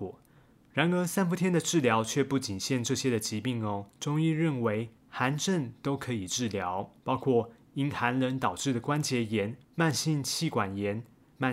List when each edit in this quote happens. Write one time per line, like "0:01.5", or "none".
0:03.9
0:05.0
0:07.0
0:09.6

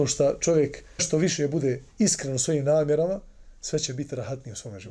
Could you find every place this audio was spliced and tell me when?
0:01.0
0:01.9

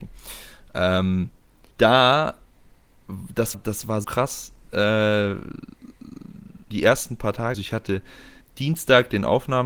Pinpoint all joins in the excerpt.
0:01.7
0:03.5
0:04.0
0:06.7
0:07.5
0:08.4

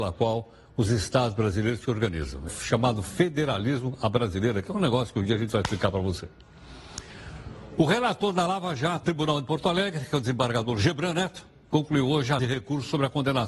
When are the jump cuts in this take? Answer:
0:02.5
0:09.0
0:12.4

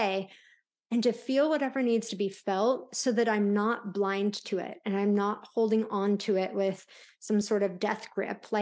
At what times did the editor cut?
none

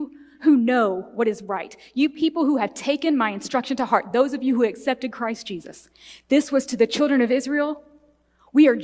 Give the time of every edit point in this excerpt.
none

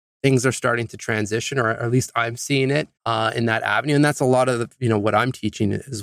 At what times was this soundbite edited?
0:03.0

